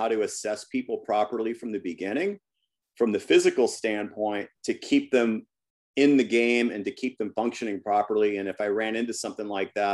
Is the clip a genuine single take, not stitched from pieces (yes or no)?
yes